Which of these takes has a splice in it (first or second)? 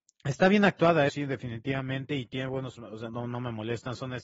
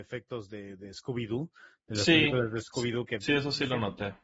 first